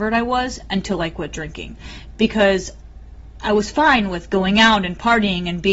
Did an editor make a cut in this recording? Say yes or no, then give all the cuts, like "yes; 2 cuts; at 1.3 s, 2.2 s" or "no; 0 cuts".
no; 0 cuts